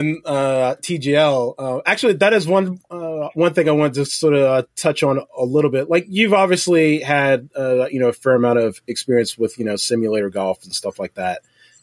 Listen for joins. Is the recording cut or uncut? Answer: uncut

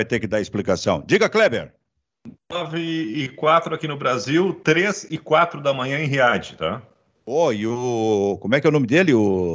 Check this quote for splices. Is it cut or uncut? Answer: uncut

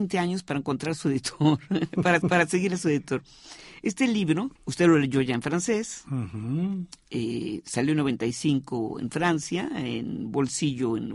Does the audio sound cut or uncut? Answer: cut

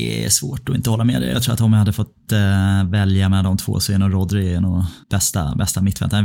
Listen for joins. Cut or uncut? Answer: cut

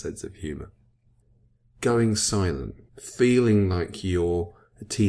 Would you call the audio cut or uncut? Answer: cut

